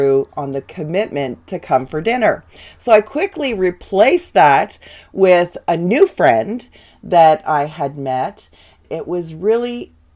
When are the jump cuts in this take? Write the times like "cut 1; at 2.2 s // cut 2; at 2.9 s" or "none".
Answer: none